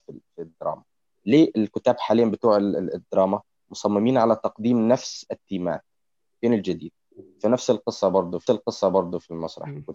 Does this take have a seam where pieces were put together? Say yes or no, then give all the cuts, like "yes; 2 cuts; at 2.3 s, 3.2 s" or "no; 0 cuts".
yes; 1 cut; at 8.5 s